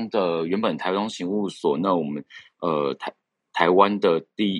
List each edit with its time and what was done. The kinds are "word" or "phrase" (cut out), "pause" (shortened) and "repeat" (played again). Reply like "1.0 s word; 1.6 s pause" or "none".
none